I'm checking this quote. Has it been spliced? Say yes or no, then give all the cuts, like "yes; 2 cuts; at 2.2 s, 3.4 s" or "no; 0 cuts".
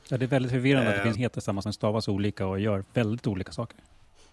yes; 3 cuts; at 1.1 s, 1.6 s, 2.8 s